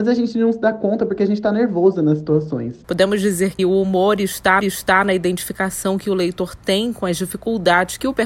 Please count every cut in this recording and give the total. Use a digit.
3